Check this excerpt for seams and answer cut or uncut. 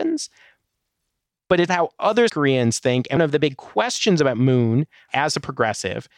cut